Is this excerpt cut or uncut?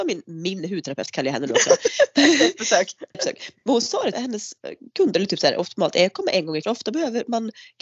cut